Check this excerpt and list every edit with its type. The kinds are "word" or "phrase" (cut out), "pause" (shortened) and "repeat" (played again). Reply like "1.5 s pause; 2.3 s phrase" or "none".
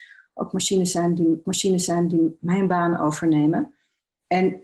1.4 s repeat